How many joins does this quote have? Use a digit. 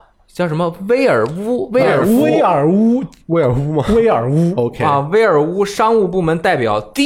0